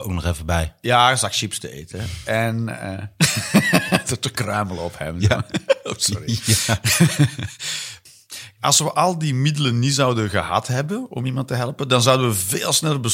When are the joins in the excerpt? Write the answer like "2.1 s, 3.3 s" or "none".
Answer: none